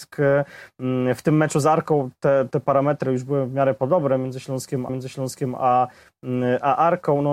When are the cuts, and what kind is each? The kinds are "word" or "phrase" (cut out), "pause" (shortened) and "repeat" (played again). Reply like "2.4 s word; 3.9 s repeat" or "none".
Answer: 2.5 s word; 4.9 s repeat